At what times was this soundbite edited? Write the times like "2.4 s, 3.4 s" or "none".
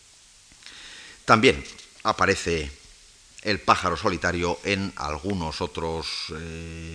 none